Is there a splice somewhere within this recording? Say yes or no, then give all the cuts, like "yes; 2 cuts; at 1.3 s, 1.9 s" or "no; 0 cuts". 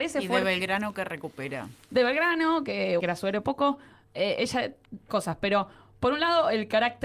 yes; 3 cuts; at 3.0 s, 3.4 s, 5.1 s